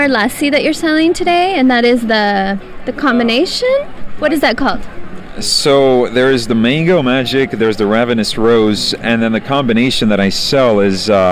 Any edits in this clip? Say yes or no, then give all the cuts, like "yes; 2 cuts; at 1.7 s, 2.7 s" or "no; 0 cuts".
no; 0 cuts